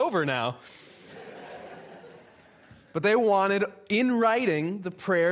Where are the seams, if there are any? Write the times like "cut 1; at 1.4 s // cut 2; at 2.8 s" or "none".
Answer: none